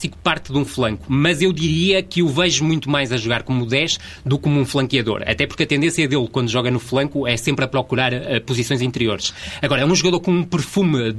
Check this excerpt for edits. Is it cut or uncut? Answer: uncut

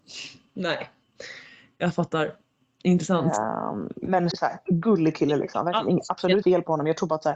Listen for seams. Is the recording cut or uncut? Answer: cut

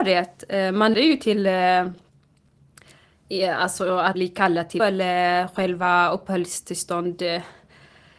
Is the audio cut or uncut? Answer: cut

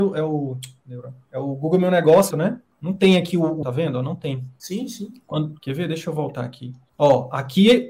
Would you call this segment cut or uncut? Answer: cut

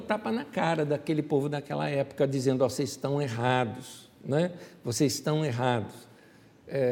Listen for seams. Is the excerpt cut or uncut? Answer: uncut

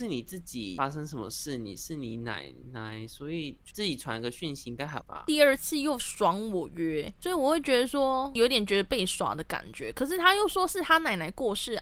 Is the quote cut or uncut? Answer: cut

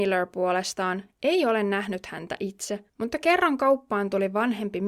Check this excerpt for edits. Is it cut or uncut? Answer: cut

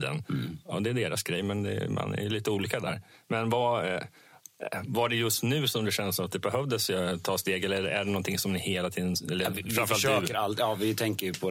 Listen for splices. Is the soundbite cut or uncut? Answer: uncut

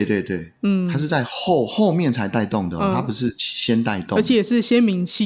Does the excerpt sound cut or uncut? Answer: uncut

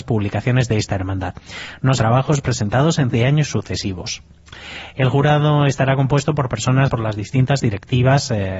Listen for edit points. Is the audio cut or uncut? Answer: cut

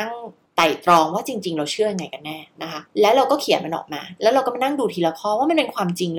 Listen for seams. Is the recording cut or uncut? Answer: cut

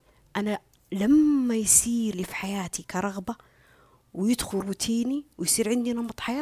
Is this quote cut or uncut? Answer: cut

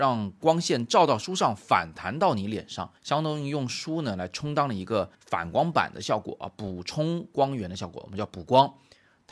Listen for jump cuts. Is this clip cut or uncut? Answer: cut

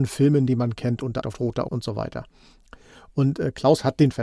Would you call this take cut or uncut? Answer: cut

